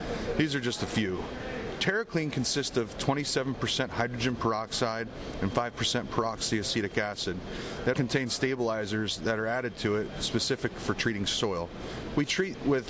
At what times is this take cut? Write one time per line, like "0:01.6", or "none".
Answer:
0:07.9